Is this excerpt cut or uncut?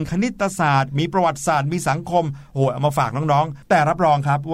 cut